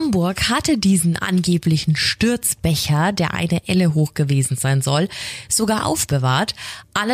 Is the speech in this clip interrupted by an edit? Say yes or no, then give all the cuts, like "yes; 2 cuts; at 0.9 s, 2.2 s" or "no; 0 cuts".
no; 0 cuts